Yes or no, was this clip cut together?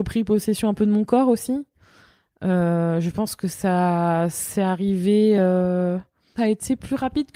no